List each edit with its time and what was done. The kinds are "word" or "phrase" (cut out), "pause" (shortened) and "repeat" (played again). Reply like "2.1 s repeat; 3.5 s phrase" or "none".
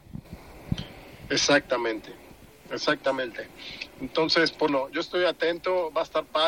4.7 s word